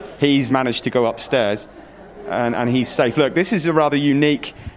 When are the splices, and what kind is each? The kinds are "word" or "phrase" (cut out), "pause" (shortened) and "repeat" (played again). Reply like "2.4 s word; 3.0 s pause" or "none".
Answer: none